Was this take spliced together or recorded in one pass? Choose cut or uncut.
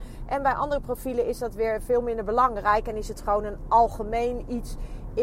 uncut